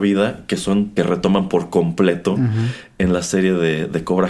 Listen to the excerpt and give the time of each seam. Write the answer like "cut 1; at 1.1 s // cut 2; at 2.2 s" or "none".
cut 1; at 1.0 s